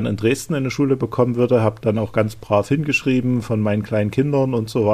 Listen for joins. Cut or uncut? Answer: uncut